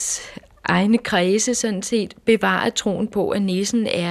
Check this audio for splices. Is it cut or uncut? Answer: uncut